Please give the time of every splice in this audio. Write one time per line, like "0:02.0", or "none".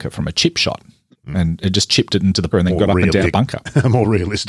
0:02.5
0:03.2